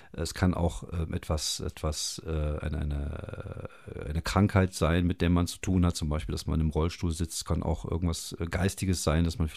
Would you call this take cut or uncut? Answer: uncut